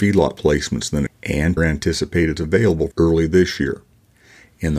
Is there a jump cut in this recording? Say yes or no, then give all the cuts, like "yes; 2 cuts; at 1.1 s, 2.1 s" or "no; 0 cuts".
yes; 4 cuts; at 1.1 s, 1.6 s, 2.4 s, 2.9 s